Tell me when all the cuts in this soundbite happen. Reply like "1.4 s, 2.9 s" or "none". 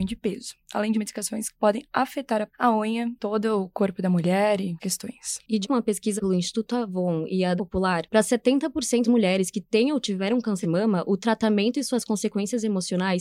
0.9 s, 2.5 s, 3.1 s, 4.8 s, 5.6 s, 6.2 s, 7.6 s, 9.0 s, 10.6 s